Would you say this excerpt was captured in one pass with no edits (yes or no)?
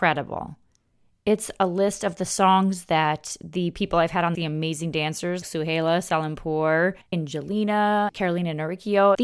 no